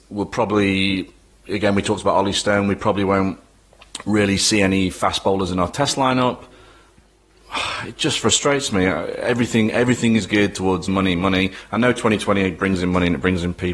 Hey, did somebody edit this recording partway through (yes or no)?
yes